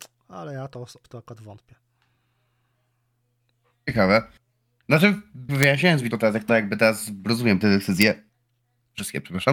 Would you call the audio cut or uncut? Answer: cut